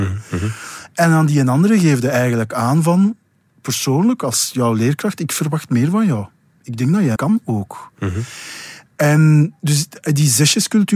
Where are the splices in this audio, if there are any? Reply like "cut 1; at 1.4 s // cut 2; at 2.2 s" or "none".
cut 1; at 3.5 s // cut 2; at 7.2 s